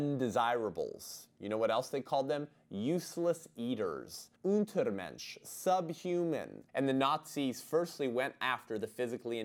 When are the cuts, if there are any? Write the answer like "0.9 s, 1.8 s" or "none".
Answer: 4.4 s, 6.7 s